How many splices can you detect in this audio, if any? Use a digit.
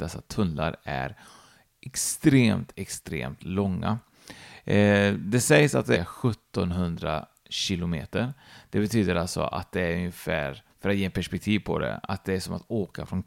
2